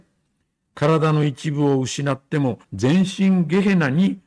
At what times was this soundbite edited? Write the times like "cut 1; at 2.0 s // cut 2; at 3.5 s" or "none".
cut 1; at 2.6 s